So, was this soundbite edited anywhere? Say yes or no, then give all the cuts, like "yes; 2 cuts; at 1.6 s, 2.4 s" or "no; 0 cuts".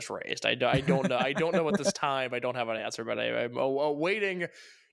no; 0 cuts